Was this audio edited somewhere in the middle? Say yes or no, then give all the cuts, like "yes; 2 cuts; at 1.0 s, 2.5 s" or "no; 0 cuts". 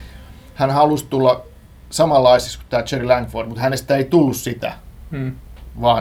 no; 0 cuts